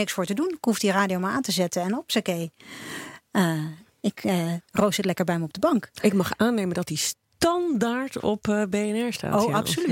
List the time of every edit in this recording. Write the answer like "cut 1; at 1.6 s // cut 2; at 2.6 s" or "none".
none